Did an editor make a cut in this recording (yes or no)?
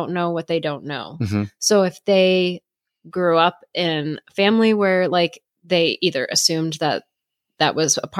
no